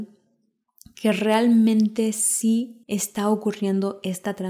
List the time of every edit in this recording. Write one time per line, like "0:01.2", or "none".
0:02.8